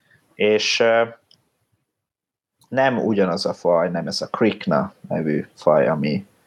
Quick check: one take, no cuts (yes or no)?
yes